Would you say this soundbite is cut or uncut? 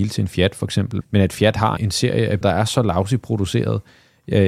cut